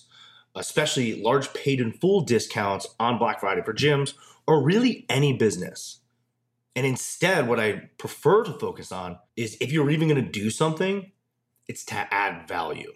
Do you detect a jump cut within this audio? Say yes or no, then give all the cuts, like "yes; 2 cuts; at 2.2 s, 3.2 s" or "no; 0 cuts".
yes; 1 cut; at 9.3 s